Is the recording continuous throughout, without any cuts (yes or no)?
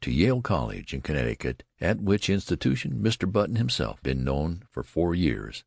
no